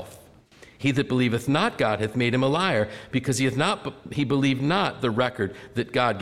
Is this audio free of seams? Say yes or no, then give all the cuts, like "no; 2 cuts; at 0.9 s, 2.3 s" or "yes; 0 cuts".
yes; 0 cuts